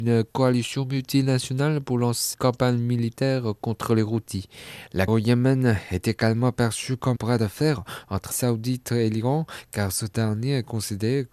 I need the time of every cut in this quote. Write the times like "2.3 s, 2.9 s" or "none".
2.3 s, 5.1 s, 7.2 s, 8.3 s